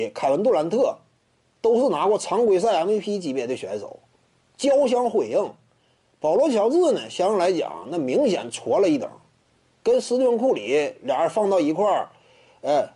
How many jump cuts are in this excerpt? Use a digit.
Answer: 0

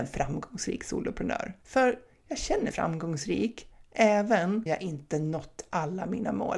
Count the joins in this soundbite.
3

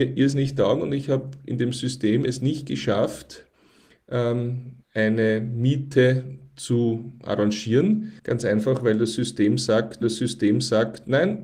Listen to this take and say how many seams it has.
3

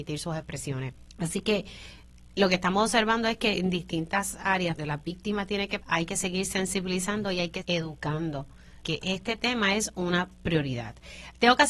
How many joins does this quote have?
5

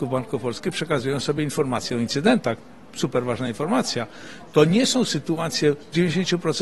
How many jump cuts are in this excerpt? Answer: 0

